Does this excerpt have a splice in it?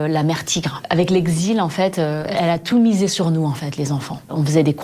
no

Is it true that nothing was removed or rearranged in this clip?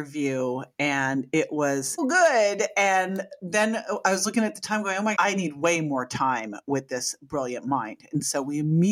no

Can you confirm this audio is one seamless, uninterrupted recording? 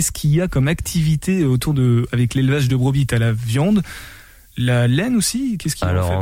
yes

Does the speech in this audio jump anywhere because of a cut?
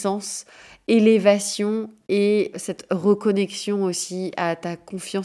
yes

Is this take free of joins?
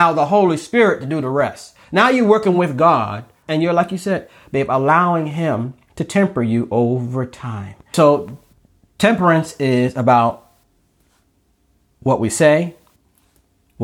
yes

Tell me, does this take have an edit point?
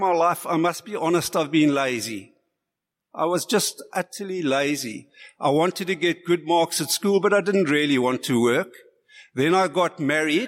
no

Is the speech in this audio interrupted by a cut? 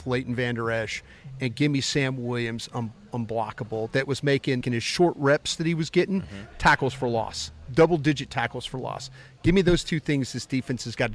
yes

